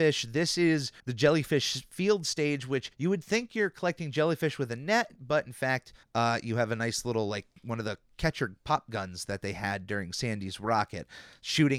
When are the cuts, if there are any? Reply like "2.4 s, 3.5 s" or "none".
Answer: 1.0 s, 2.9 s, 6.0 s